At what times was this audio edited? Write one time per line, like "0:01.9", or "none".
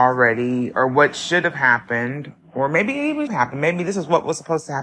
0:03.3